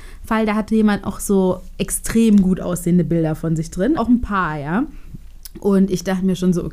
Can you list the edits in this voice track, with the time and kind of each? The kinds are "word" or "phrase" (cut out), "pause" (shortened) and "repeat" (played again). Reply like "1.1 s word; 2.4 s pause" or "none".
4.0 s word